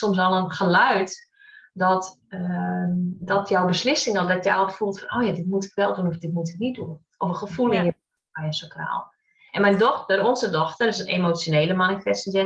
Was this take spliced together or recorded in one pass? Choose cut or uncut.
uncut